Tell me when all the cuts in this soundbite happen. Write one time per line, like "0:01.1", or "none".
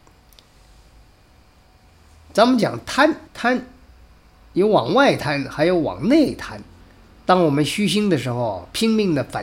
0:03.3
0:06.8